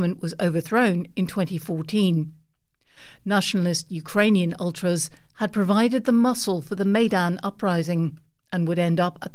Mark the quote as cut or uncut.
uncut